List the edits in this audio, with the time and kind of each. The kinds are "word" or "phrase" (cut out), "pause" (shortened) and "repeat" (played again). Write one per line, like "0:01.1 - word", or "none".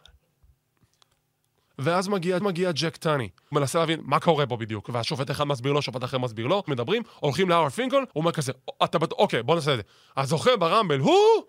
0:02.4 - repeat
0:03.5 - word
0:06.7 - word
0:08.1 - pause